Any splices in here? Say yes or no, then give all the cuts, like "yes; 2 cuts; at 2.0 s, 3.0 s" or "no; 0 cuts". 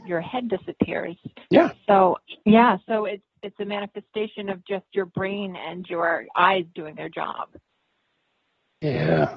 yes; 2 cuts; at 1.4 s, 2.4 s